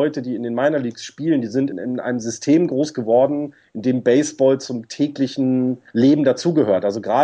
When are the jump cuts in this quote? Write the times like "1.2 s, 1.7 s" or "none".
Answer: 1.7 s, 5.9 s